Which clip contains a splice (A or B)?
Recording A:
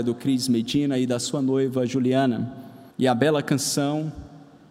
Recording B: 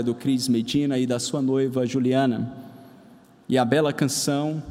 A